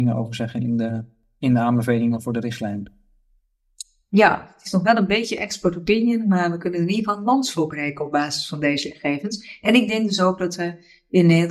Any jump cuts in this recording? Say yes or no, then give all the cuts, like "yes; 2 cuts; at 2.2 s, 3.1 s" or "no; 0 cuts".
no; 0 cuts